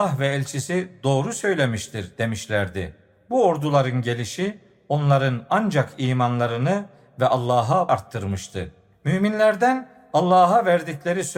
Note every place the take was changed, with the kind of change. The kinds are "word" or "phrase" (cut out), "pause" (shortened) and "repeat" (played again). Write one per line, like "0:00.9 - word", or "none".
0:07.9 - word

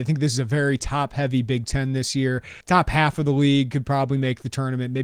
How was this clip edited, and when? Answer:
0:02.6 - pause

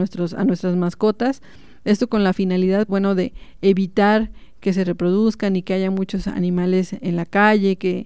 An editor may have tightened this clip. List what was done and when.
0:02.9 - word

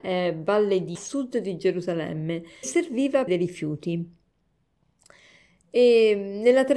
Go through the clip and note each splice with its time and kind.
0:00.9 - phrase
0:02.6 - word
0:03.3 - phrase

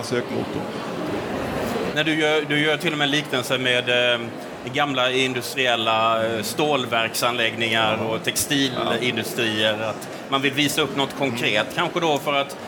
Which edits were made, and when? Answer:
none

